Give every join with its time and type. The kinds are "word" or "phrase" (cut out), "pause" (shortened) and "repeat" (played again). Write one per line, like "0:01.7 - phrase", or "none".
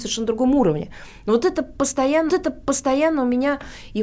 0:02.3 - repeat